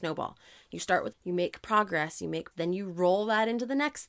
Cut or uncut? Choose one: cut